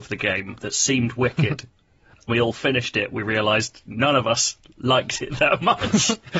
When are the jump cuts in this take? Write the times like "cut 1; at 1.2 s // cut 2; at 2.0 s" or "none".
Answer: cut 1; at 2.3 s

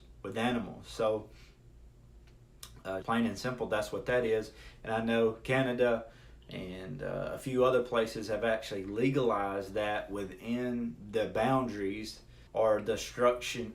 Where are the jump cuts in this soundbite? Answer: cut 1; at 3.0 s // cut 2; at 12.5 s

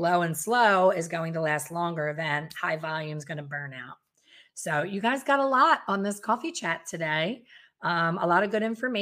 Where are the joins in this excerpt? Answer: none

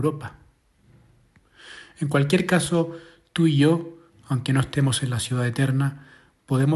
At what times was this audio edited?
none

